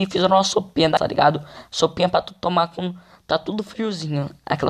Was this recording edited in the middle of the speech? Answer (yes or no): no